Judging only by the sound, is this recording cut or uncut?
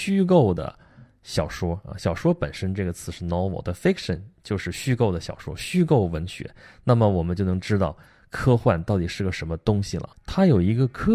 cut